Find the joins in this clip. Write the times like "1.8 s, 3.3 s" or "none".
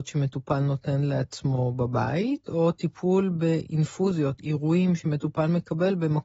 none